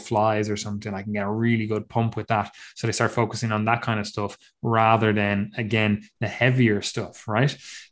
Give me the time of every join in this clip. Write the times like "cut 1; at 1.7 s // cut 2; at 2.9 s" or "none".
none